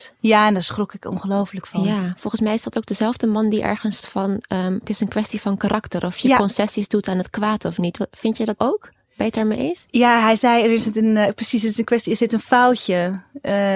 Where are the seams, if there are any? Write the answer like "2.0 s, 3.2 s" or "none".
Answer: 4.0 s, 8.6 s